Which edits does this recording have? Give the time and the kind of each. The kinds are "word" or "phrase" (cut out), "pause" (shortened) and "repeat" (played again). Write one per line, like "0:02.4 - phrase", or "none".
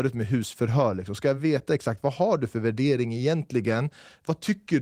none